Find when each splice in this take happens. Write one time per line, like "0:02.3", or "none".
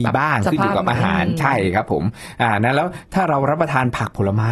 none